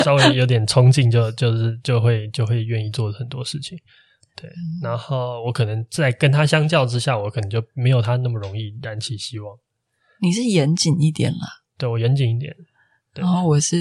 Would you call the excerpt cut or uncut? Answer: uncut